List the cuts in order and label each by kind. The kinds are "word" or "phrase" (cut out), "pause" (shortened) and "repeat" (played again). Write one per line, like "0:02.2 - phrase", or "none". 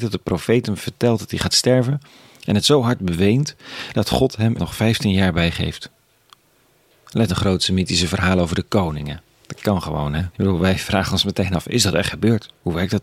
0:04.5 - word
0:07.3 - phrase
0:10.3 - pause